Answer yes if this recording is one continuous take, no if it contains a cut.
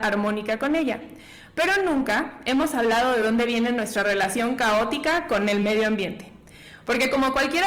yes